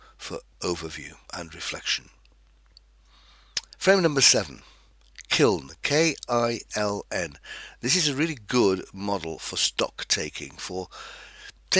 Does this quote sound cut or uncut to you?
cut